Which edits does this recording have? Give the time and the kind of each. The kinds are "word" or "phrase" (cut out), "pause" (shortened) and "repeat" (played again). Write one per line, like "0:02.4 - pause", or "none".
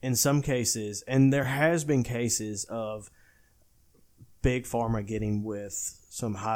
none